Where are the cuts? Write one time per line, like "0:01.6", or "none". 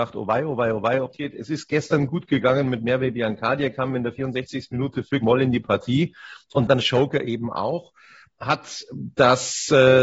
0:01.1
0:05.2
0:06.8